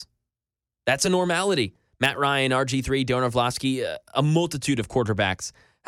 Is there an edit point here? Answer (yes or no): no